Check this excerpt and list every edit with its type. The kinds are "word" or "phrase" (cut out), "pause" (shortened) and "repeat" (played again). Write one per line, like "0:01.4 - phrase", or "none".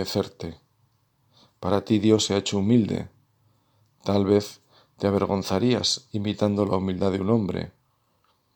none